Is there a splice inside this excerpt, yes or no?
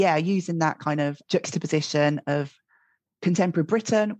no